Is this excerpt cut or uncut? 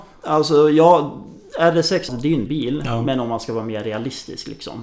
cut